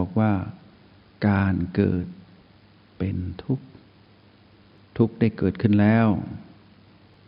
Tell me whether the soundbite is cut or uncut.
uncut